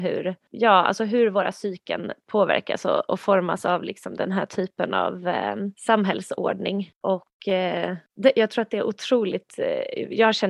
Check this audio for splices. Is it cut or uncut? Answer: cut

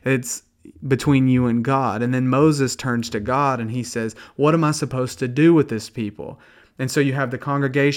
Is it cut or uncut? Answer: uncut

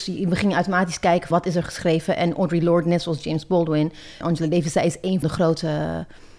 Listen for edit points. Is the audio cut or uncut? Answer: cut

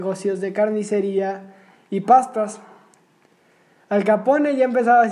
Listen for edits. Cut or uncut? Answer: uncut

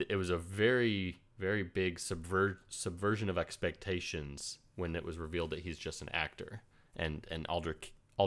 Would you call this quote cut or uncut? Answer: uncut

